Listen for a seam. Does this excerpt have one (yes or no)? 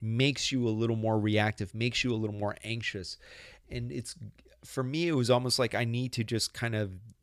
yes